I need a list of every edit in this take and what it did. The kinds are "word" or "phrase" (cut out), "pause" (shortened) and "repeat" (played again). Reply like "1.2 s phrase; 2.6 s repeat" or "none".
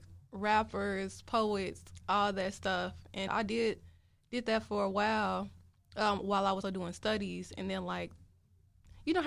3.3 s word; 6.6 s word

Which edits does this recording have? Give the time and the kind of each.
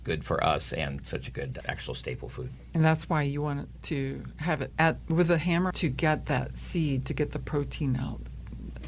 1.6 s word; 4.7 s word; 5.7 s word

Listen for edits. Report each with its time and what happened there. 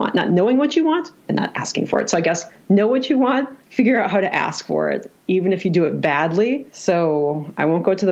3.6 s pause; 6.7 s pause

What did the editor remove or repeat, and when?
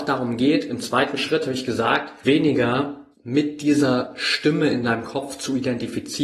2.2 s word; 3.1 s pause

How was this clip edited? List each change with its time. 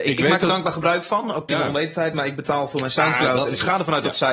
1.5 s word; 2.1 s word

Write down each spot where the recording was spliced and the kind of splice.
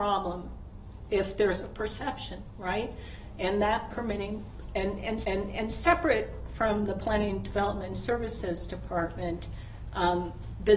3.9 s phrase; 5.2 s repeat

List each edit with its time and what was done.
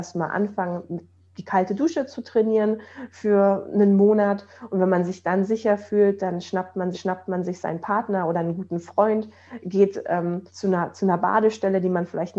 6.9 s repeat; 10.5 s pause

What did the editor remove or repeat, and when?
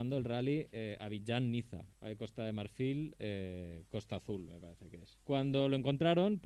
1.9 s pause; 5.2 s pause

